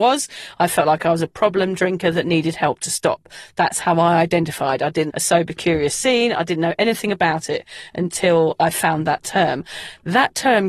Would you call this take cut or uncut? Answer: cut